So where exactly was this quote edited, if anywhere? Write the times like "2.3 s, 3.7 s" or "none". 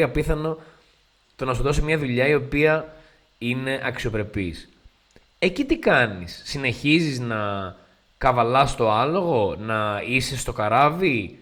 none